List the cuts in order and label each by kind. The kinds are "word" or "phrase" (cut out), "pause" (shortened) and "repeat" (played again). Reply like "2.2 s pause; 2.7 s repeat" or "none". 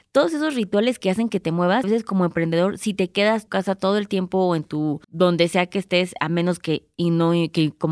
1.8 s word; 3.5 s phrase; 5.0 s pause